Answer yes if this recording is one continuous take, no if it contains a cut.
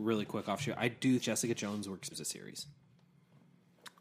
no